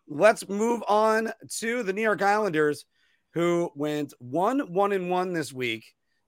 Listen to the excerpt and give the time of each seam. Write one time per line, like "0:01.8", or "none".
none